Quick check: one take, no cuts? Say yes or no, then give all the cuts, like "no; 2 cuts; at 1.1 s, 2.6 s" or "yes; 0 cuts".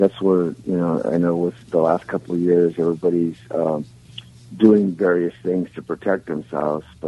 yes; 0 cuts